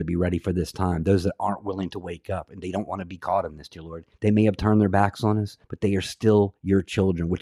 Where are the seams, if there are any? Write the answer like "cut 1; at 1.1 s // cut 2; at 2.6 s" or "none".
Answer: cut 1; at 4.1 s // cut 2; at 5.6 s

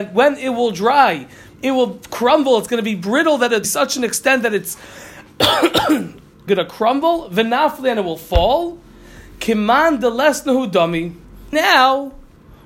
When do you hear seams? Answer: cut 1; at 1.5 s // cut 2; at 3.6 s // cut 3; at 6.5 s // cut 4; at 11.5 s

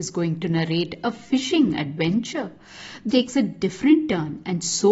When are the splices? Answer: cut 1; at 3.1 s

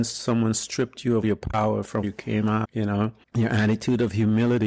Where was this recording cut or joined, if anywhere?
cut 1; at 1.2 s // cut 2; at 2.0 s // cut 3; at 2.6 s // cut 4; at 3.2 s

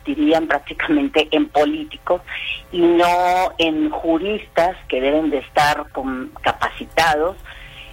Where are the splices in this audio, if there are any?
none

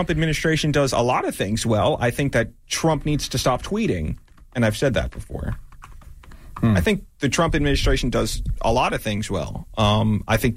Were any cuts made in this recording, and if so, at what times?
none

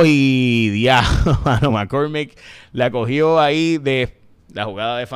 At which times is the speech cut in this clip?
none

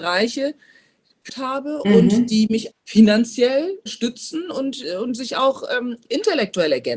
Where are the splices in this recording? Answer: cut 1; at 1.3 s // cut 2; at 2.7 s // cut 3; at 3.9 s

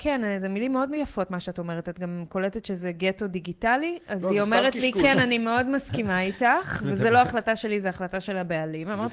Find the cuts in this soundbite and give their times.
none

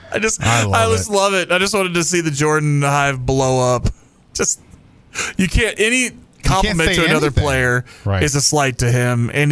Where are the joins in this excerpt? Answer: none

